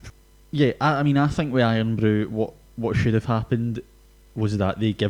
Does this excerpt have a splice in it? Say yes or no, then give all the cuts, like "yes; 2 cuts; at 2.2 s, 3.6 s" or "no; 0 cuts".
no; 0 cuts